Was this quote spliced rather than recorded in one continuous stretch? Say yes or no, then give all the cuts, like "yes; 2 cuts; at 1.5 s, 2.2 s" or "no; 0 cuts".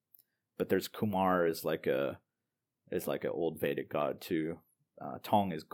no; 0 cuts